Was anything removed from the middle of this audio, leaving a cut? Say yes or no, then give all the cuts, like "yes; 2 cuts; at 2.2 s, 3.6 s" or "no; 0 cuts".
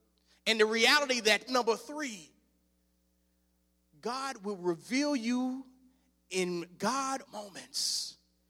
yes; 2 cuts; at 1.5 s, 7.2 s